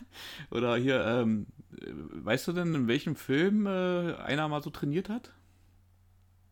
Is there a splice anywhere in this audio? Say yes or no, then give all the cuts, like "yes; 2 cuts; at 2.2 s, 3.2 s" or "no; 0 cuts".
no; 0 cuts